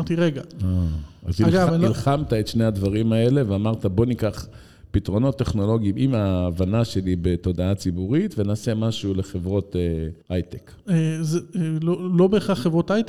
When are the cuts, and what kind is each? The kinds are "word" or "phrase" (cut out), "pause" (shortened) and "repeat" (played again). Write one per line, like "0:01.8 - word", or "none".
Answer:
0:10.2 - pause